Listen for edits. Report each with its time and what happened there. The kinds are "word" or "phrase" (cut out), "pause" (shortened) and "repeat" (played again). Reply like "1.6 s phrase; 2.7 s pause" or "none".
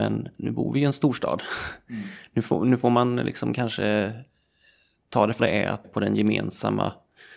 5.4 s word; 5.8 s phrase